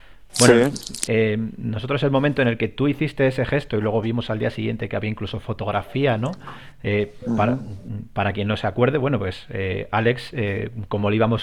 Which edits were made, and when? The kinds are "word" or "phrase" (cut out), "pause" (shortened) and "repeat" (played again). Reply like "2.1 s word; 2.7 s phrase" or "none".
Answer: none